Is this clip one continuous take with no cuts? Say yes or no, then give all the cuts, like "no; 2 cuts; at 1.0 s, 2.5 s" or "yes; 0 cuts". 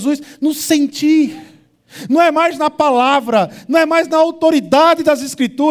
yes; 0 cuts